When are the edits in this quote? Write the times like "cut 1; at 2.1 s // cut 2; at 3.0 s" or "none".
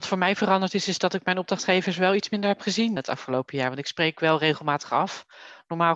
cut 1; at 3.0 s